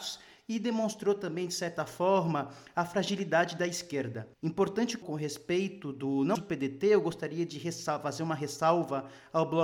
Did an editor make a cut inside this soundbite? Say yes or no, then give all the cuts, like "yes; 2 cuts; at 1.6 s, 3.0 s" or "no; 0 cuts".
yes; 3 cuts; at 4.3 s, 5.0 s, 6.3 s